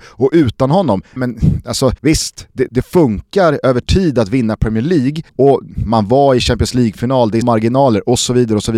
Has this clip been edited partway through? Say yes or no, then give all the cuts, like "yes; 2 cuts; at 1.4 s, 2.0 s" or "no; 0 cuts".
yes; 5 cuts; at 1.2 s, 2.0 s, 2.7 s, 5.3 s, 7.4 s